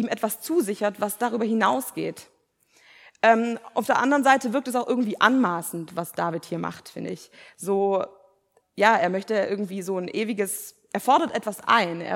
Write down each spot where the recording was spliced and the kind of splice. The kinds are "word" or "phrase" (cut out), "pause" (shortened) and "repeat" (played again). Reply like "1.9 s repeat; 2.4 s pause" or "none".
8.6 s word

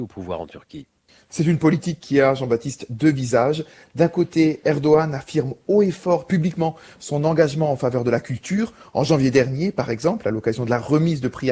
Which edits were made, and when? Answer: none

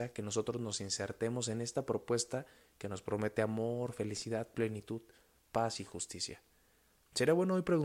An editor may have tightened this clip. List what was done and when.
none

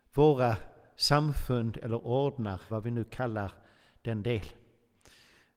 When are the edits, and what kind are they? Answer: 2.7 s word

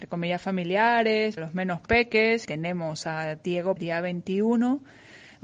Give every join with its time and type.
1.4 s word; 2.4 s word; 3.8 s word

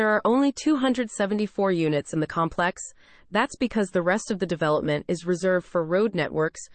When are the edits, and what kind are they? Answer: none

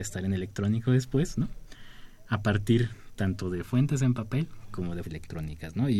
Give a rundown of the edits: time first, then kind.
5.0 s word

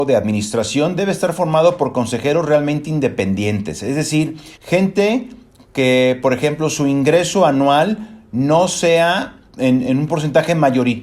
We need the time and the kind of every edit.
4.5 s pause; 9.5 s pause

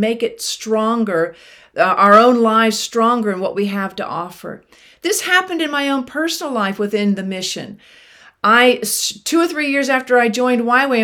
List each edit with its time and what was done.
none

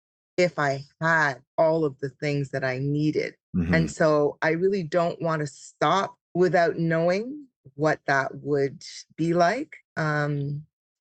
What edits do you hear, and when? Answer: 1.5 s pause; 3.4 s pause; 6.2 s pause; 9.9 s pause

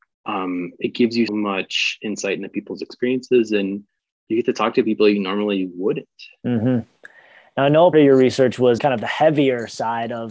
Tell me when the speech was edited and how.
1.3 s word; 7.9 s word; 8.8 s word

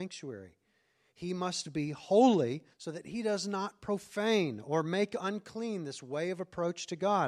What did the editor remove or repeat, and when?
2.7 s pause

